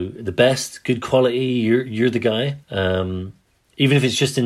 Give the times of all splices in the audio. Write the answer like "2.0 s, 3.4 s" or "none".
2.6 s